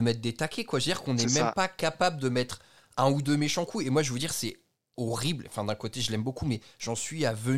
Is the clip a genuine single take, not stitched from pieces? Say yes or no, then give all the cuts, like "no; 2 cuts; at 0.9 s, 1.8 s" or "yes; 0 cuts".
yes; 0 cuts